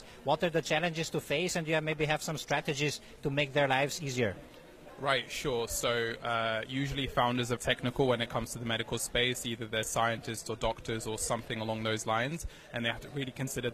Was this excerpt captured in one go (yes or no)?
no